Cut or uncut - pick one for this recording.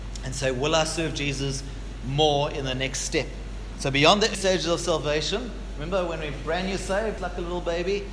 cut